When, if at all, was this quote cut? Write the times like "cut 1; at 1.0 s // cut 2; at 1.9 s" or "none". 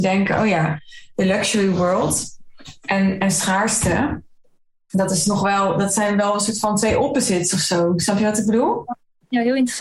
none